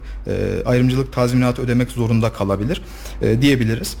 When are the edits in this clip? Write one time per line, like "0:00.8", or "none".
none